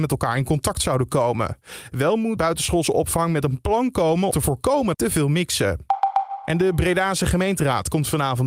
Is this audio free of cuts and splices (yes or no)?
no